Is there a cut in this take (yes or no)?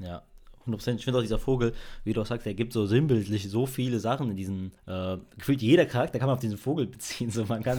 yes